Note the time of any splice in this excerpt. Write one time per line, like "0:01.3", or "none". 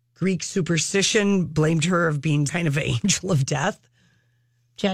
0:02.5